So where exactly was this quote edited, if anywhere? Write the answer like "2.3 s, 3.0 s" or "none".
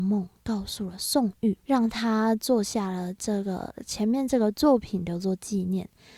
1.6 s